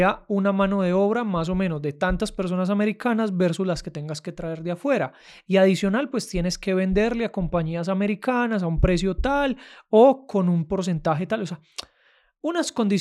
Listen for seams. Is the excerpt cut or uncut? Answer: uncut